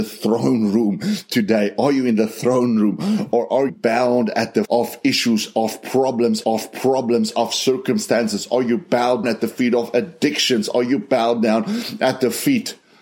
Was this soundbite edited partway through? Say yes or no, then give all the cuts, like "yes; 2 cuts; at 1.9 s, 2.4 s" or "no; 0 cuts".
yes; 4 cuts; at 3.7 s, 4.6 s, 6.4 s, 9.2 s